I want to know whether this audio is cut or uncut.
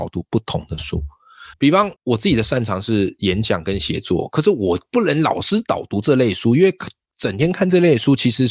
cut